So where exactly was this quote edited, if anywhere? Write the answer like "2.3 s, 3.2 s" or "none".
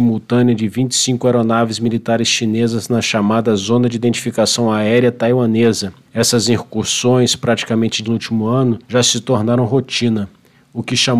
6.1 s, 8.0 s, 8.8 s